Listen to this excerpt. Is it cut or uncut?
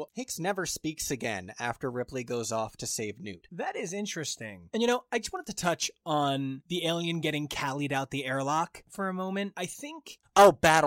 uncut